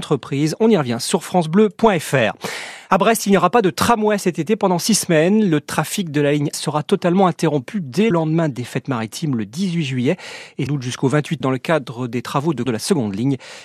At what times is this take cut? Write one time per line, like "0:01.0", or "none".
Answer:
0:06.5
0:08.1
0:10.7
0:11.4
0:12.7